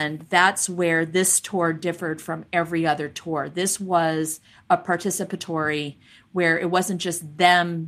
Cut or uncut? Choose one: uncut